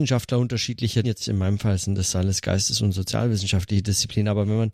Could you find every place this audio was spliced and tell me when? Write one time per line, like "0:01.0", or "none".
0:01.0